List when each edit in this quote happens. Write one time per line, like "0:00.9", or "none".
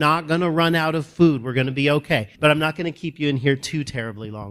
0:02.3